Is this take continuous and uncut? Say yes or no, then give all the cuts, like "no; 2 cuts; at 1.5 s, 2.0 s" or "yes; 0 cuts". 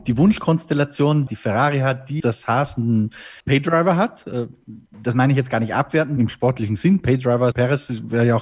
no; 6 cuts; at 1.3 s, 2.2 s, 3.4 s, 4.9 s, 6.2 s, 7.5 s